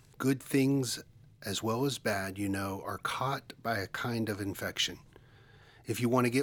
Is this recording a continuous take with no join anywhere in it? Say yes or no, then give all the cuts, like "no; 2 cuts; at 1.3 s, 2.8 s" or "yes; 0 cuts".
yes; 0 cuts